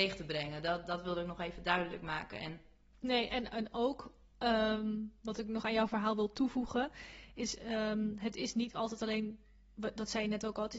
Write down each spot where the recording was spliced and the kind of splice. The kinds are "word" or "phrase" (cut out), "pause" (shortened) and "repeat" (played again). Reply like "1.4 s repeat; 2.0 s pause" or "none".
none